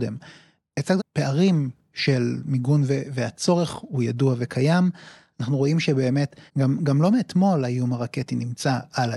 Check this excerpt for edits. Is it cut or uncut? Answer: cut